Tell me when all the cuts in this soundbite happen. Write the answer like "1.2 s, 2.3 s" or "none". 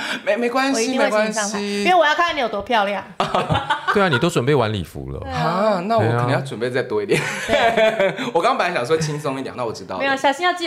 9.5 s